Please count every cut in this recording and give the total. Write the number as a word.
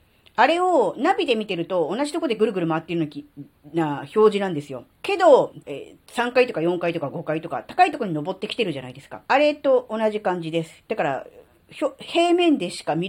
three